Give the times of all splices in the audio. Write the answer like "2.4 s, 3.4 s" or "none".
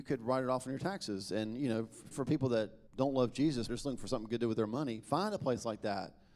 2.1 s, 2.9 s, 3.7 s